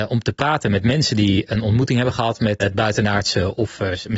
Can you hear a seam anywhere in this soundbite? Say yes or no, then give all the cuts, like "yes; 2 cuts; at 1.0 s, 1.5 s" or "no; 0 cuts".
yes; 1 cut; at 2.6 s